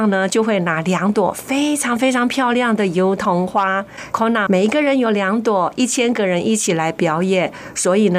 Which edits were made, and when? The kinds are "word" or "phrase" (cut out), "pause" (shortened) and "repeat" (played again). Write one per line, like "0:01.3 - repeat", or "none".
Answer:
0:04.1 - word
0:04.5 - word